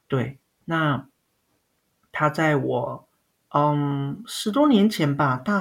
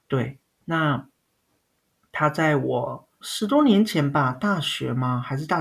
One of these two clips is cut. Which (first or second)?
second